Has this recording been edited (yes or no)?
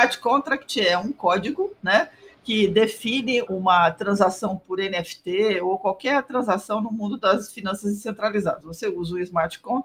yes